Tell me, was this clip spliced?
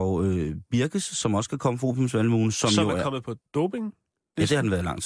yes; 1 cut; at 3.5 s

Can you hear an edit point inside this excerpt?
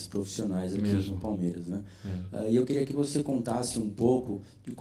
no; 0 cuts

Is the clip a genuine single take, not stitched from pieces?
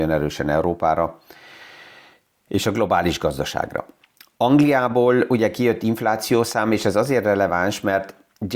yes; 0 cuts

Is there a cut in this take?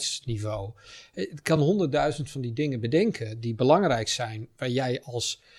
no; 0 cuts

